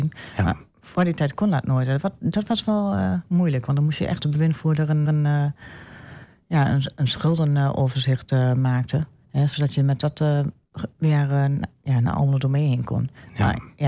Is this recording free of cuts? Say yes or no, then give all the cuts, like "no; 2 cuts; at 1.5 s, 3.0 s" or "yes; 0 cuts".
no; 3 cuts; at 4.2 s, 5.0 s, 9.2 s